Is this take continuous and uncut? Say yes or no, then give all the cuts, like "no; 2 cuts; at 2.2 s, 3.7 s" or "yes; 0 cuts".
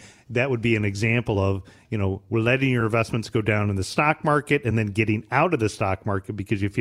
yes; 0 cuts